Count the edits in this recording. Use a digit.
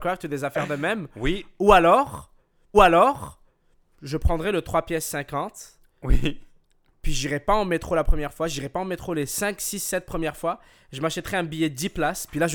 1